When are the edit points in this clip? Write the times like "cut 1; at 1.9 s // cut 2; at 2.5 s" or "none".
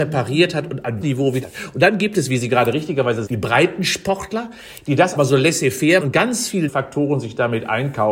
cut 1; at 1.0 s // cut 2; at 1.4 s // cut 3; at 3.3 s // cut 4; at 5.2 s // cut 5; at 6.0 s // cut 6; at 6.7 s